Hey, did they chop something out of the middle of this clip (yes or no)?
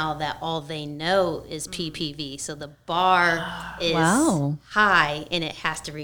no